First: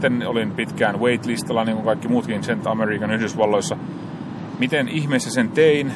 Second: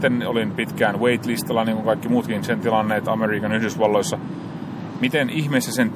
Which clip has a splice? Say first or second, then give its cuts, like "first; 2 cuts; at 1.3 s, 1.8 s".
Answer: first; 1 cut; at 2.6 s